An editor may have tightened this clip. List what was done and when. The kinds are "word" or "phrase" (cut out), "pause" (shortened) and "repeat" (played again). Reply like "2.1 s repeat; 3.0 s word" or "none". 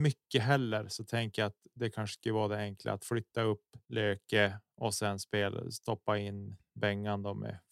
3.8 s pause